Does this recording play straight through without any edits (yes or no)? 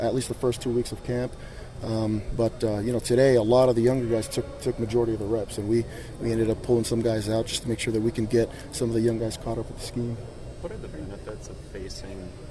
yes